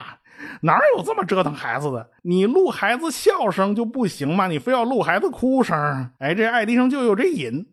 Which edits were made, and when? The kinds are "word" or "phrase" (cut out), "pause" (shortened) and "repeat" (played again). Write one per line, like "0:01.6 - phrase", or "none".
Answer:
0:02.2 - pause
0:06.2 - pause